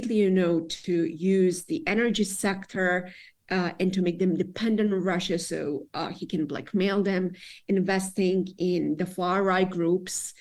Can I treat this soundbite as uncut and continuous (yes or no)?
yes